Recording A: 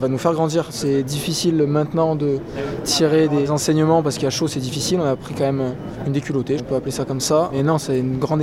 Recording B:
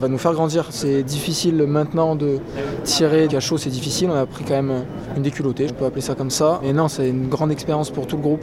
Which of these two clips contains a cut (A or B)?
B